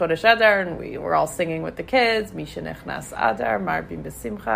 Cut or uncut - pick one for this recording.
uncut